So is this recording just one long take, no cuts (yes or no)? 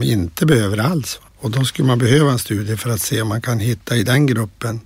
no